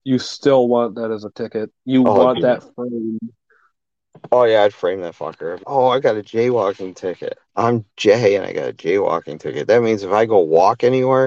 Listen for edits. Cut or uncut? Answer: cut